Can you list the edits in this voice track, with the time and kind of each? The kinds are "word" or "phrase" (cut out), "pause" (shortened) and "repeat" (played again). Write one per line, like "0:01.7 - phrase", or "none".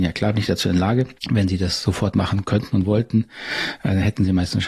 0:01.2 - pause